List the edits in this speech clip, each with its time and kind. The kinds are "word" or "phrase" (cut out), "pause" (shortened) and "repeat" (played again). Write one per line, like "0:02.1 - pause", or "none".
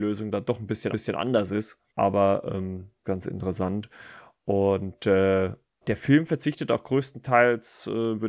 0:00.9 - repeat
0:01.9 - pause
0:03.0 - phrase
0:05.8 - word